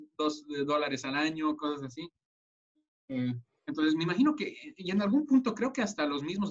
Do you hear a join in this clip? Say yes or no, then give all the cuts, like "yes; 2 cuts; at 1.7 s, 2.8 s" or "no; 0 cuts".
no; 0 cuts